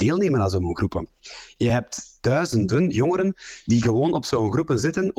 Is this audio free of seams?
yes; 0 cuts

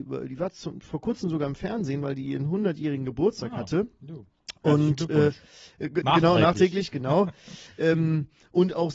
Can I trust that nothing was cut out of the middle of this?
yes; 0 cuts

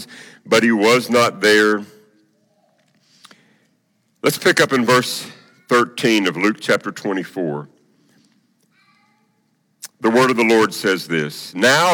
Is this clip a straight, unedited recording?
yes; 0 cuts

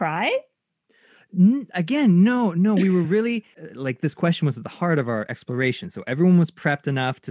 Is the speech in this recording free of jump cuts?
yes; 0 cuts

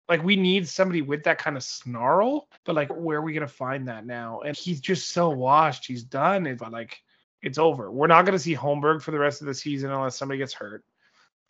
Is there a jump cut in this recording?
yes; 5 cuts; at 2.6 s, 2.9 s, 4.5 s, 6.6 s, 7.2 s

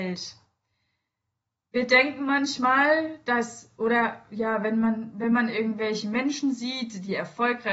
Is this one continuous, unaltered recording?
yes; 0 cuts

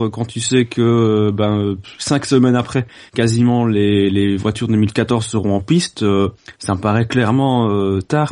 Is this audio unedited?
yes; 0 cuts

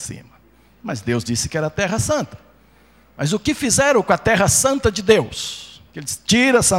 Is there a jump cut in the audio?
no; 0 cuts

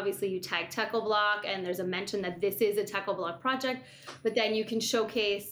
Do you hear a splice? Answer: no; 0 cuts

